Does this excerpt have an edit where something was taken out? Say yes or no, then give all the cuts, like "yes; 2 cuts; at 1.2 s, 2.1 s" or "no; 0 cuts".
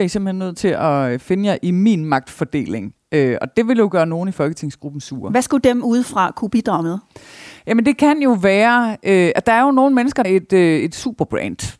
yes; 1 cut; at 10.2 s